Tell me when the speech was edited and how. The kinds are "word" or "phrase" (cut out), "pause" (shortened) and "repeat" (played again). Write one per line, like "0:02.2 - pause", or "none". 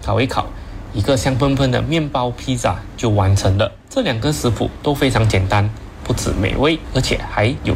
0:03.8 - pause